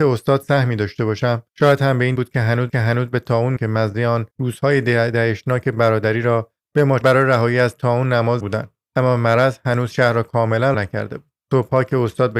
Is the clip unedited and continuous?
no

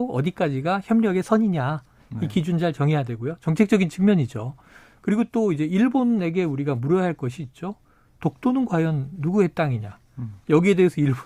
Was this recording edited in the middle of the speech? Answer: no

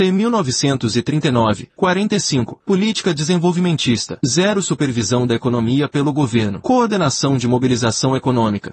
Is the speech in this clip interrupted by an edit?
no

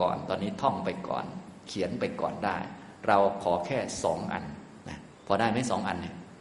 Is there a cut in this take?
yes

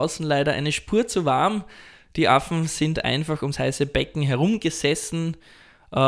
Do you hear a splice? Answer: no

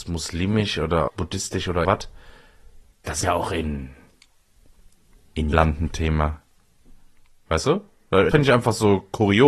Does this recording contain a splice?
yes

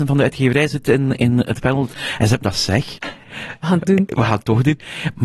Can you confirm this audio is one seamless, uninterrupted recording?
no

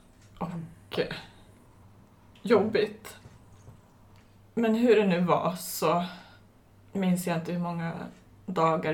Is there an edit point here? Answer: no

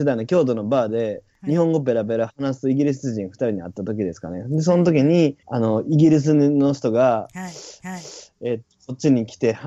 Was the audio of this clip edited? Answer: yes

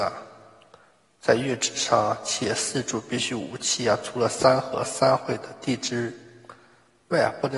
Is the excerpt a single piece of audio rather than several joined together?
yes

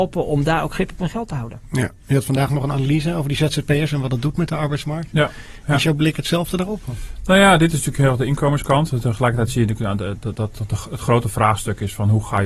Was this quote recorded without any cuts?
yes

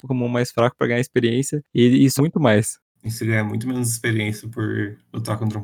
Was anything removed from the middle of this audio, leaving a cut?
yes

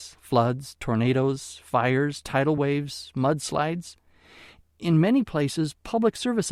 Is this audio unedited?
yes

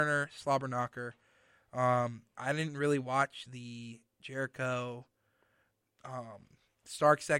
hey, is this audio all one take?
yes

